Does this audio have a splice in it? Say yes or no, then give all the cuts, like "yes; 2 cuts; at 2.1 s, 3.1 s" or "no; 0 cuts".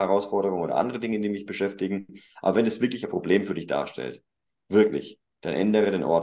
no; 0 cuts